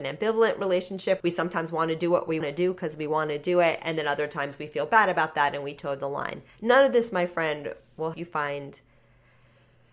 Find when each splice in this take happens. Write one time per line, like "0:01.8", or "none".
0:01.2
0:02.4
0:08.1